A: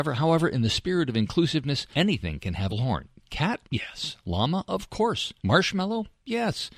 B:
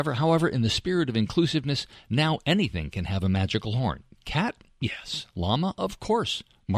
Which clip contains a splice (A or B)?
A